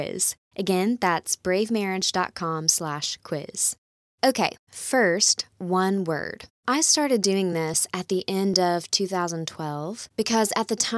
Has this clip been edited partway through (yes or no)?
no